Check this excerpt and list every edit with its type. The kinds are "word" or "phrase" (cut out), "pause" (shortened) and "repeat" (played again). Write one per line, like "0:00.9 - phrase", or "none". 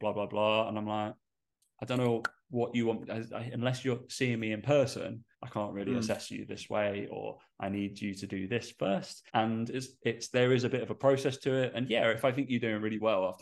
0:01.5 - pause
0:05.3 - pause
0:09.3 - pause